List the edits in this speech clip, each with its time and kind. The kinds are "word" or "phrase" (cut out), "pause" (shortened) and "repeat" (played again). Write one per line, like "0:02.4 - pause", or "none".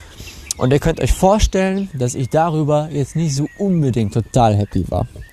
none